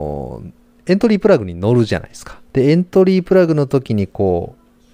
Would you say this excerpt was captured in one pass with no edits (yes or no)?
no